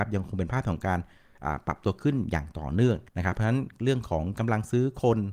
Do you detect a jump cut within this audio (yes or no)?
yes